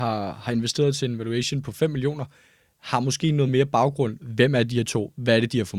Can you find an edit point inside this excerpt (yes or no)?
no